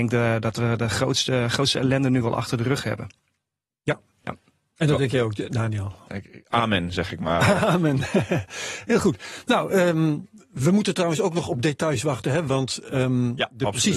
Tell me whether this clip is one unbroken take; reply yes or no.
yes